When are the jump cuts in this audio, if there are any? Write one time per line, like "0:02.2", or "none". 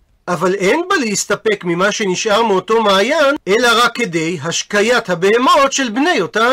0:03.4